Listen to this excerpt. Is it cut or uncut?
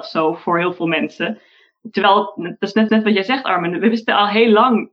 cut